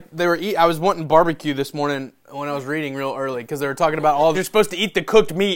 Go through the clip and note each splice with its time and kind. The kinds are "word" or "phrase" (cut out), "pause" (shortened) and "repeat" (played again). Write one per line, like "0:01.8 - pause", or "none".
0:04.3 - phrase